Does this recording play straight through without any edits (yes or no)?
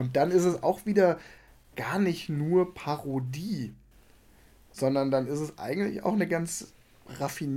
yes